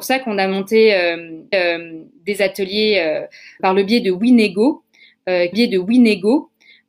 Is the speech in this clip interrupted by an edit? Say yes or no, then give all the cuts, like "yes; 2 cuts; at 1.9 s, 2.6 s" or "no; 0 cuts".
yes; 3 cuts; at 1.5 s, 3.6 s, 5.5 s